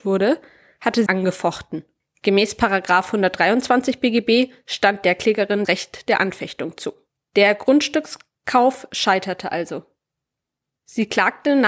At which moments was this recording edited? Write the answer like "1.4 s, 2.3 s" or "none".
1.1 s, 2.0 s, 5.6 s, 7.1 s